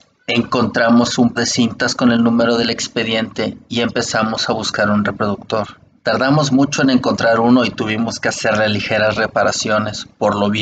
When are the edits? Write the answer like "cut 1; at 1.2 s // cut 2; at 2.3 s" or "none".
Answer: cut 1; at 1.3 s // cut 2; at 6.0 s